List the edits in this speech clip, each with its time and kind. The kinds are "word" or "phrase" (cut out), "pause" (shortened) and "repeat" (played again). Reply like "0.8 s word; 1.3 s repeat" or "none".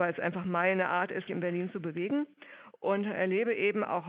1.3 s word